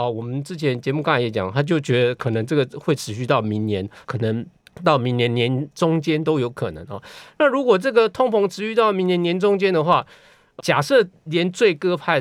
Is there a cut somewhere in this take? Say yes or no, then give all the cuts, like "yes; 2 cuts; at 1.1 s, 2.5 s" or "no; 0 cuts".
yes; 3 cuts; at 4.0 s, 4.6 s, 10.6 s